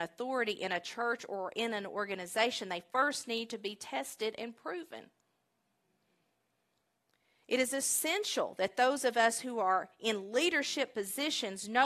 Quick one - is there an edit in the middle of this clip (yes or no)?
no